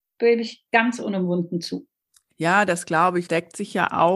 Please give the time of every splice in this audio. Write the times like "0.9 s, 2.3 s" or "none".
2.0 s, 3.3 s